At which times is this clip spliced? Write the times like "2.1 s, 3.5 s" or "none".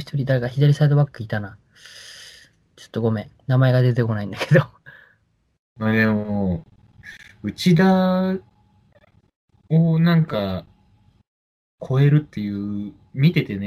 none